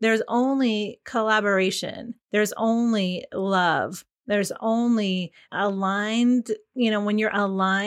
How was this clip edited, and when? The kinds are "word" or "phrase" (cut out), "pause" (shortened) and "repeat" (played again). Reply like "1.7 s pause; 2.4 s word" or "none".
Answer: 2.2 s pause; 5.5 s word